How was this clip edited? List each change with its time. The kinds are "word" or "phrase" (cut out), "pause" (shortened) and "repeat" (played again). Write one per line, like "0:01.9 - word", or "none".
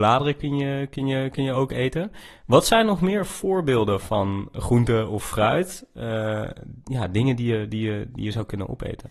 none